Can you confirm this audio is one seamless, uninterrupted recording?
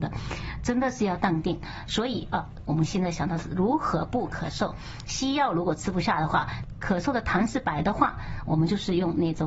no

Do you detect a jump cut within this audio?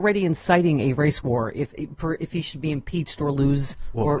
no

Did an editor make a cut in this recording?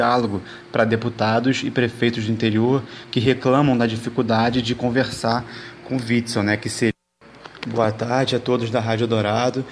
no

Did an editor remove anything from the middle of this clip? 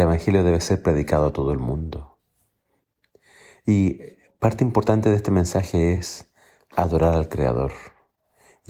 no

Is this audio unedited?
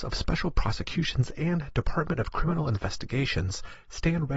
yes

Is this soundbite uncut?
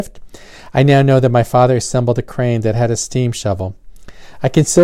yes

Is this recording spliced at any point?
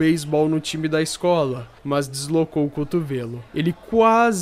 yes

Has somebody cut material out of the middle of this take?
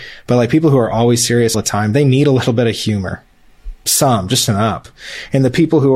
yes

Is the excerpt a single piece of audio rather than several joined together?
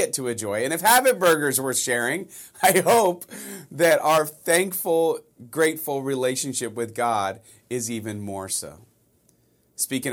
yes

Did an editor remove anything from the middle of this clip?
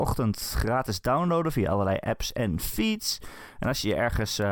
no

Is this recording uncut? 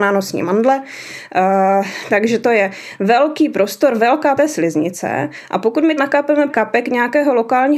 no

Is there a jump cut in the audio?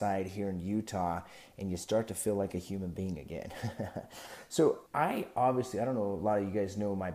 yes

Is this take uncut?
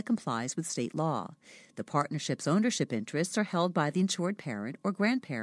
yes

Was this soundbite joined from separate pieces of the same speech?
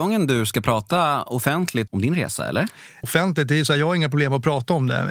yes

